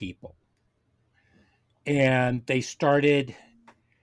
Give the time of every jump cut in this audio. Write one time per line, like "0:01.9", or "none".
none